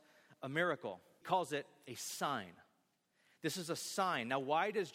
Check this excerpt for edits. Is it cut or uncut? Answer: cut